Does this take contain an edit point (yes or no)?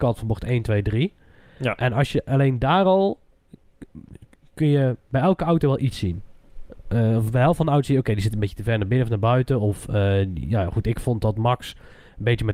no